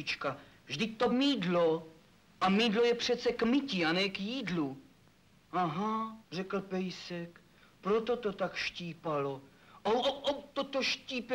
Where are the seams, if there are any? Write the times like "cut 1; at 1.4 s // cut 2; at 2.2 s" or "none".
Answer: cut 1; at 1.1 s // cut 2; at 6.2 s // cut 3; at 10.0 s